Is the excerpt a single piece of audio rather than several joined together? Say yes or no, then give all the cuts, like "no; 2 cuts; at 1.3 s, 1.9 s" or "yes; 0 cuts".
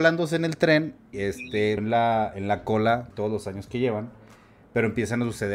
no; 3 cuts; at 1.1 s, 1.8 s, 3.1 s